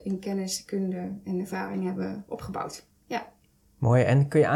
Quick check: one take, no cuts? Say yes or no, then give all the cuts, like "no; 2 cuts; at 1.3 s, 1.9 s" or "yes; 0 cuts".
yes; 0 cuts